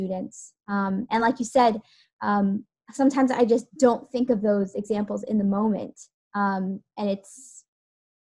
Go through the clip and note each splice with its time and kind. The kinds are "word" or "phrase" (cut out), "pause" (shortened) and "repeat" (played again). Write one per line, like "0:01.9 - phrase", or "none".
none